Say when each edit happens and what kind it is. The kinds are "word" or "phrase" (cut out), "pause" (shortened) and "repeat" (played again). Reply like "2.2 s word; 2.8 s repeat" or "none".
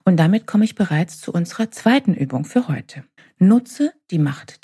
3.2 s pause